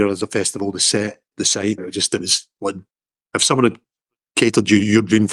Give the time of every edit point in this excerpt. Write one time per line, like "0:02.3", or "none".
0:01.3
0:01.8